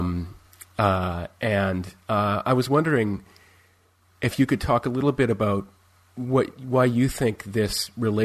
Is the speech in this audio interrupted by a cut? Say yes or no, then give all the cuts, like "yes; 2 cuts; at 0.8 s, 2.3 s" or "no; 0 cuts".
no; 0 cuts